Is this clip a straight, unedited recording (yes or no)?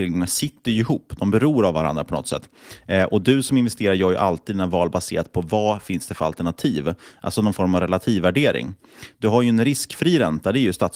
yes